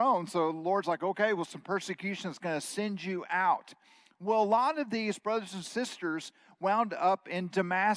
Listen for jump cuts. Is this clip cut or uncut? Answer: uncut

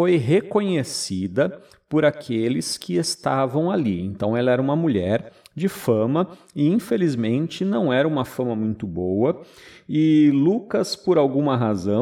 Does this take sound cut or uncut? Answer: uncut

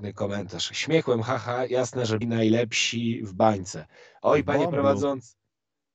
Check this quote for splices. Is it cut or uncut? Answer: cut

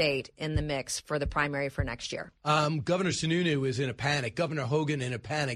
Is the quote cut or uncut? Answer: uncut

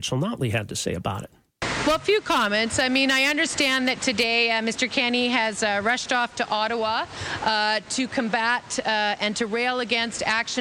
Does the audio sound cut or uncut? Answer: uncut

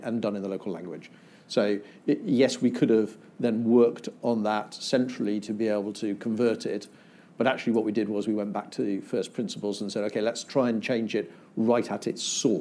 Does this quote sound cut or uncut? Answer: uncut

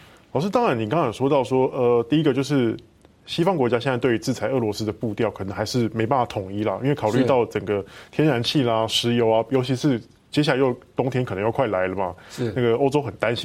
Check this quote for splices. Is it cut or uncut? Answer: uncut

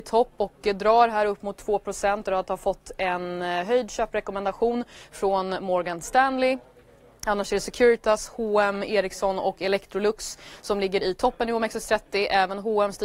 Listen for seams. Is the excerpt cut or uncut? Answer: cut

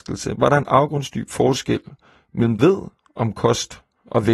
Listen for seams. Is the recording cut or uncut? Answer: cut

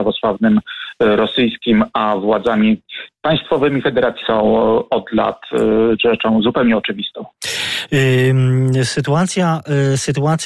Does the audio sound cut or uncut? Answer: cut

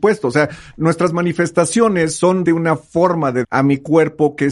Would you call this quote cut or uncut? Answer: cut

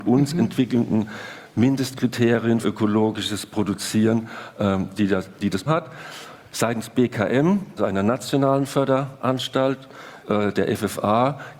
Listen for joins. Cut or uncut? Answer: cut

